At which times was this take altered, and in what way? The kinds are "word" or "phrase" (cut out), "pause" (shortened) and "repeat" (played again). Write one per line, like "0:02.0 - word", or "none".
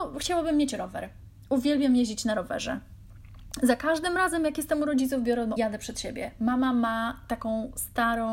0:05.6 - phrase